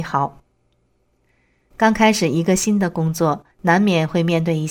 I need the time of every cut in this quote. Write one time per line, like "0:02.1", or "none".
0:03.5